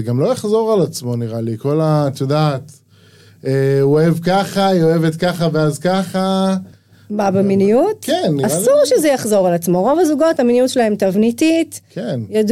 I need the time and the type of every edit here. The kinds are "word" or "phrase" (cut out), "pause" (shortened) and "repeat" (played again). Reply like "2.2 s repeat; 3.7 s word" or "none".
none